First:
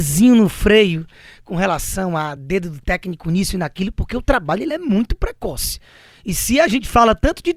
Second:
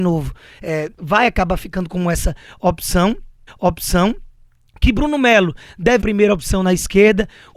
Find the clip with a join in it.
second; 3 cuts; at 0.9 s, 3.5 s, 6.0 s

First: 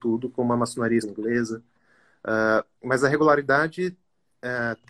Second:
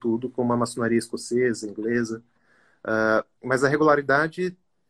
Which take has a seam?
first; 1 cut; at 1.0 s

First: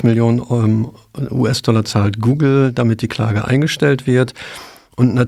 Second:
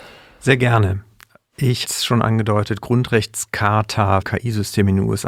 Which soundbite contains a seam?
second; 2 cuts; at 1.8 s, 4.2 s

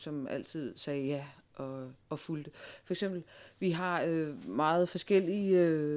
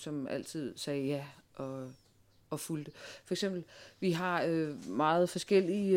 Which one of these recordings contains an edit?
first; 1 cut; at 2.0 s

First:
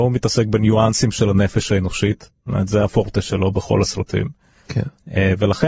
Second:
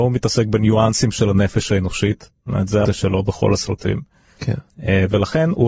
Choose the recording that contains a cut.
second; 1 cut; at 2.9 s

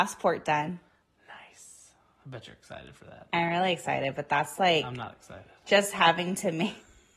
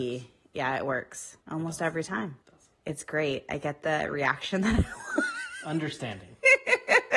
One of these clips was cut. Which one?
second; 3 cuts; at 1.4 s, 2.4 s, 2.8 s

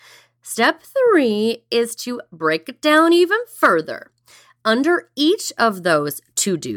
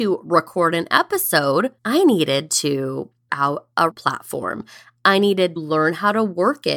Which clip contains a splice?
second; 4 cuts; at 1.8 s, 3.3 s, 3.9 s, 5.6 s

